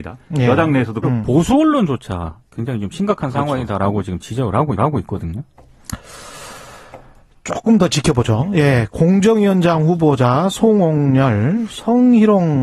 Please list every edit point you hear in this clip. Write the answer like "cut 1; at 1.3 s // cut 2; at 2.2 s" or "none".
cut 1; at 1.0 s // cut 2; at 4.8 s